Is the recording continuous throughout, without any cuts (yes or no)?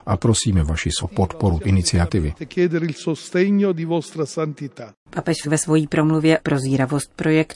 no